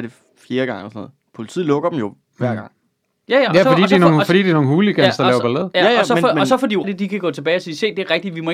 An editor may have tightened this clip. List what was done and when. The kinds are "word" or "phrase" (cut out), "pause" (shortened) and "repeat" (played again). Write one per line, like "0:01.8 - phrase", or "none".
0:02.2 - pause
0:06.8 - phrase